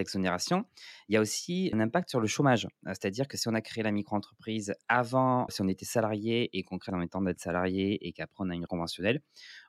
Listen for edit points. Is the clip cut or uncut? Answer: cut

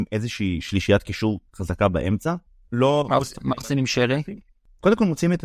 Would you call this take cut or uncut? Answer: cut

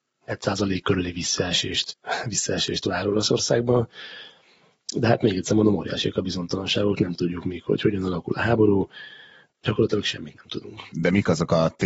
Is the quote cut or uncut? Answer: uncut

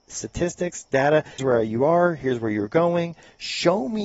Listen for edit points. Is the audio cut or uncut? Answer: cut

